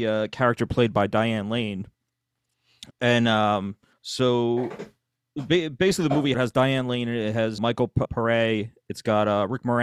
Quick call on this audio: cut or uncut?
cut